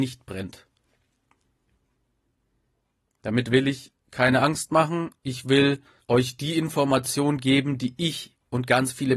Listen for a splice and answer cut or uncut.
cut